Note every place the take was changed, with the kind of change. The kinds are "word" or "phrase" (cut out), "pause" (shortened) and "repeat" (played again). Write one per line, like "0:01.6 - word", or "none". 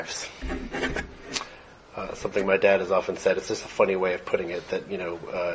none

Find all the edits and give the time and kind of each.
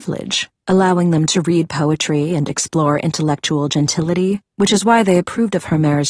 0:04.5 - pause

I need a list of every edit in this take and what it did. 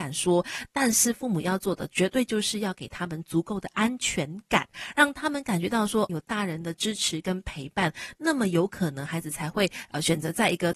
0:06.1 - word

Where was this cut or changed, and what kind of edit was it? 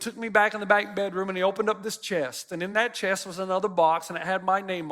none

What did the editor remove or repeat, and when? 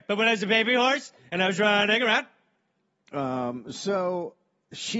none

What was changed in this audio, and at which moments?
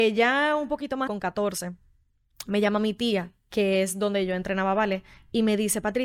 0:01.1 - word

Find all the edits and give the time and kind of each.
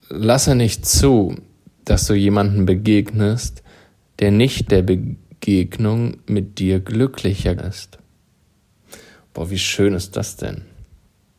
0:04.7 - word
0:07.6 - word

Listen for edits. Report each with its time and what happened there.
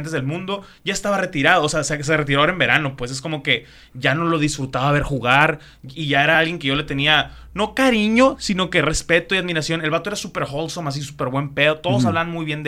none

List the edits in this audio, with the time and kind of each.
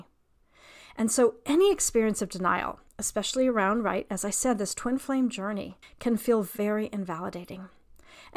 0:02.9 - pause
0:05.8 - pause

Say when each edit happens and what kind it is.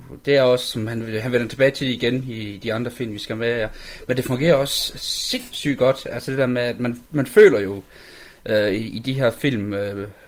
none

